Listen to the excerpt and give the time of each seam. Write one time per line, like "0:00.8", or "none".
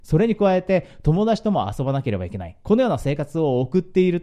0:02.6